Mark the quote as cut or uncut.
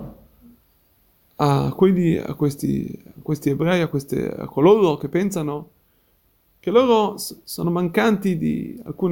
uncut